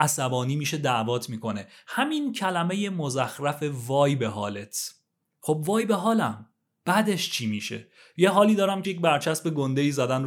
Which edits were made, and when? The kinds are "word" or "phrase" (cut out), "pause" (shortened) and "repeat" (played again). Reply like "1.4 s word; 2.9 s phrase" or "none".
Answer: 8.8 s word